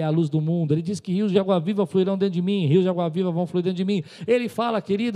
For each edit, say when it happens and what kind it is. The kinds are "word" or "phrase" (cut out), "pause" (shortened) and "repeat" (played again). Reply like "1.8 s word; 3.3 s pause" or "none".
none